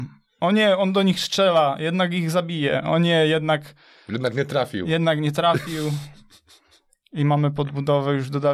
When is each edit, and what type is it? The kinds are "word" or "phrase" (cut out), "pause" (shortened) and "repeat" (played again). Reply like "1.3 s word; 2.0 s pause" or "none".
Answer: none